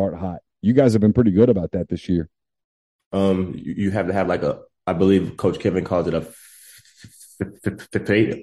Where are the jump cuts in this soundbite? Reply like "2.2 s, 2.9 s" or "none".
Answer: none